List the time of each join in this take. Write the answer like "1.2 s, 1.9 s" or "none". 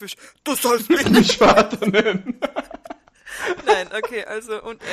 1.0 s